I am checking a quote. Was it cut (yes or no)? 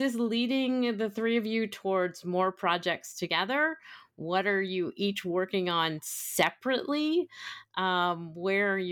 no